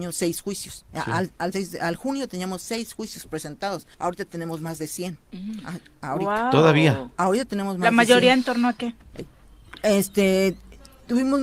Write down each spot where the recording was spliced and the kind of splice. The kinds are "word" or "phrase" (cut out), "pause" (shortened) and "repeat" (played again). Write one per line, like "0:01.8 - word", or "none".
0:03.9 - pause